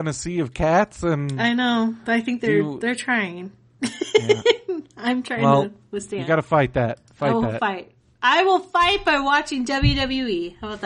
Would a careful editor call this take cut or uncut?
uncut